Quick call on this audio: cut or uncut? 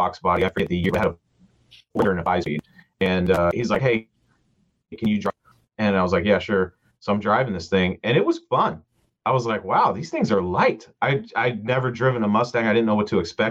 uncut